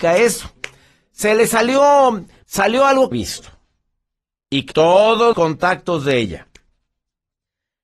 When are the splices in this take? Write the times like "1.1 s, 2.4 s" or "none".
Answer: 2.4 s, 3.1 s, 4.7 s, 5.3 s